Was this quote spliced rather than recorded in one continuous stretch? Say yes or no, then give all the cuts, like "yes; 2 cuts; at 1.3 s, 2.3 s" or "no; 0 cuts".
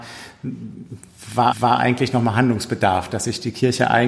yes; 1 cut; at 1.5 s